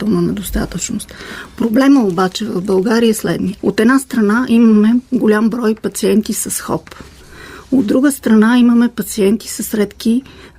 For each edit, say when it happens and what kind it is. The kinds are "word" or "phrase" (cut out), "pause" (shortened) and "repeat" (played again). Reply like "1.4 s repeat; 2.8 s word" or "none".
3.6 s pause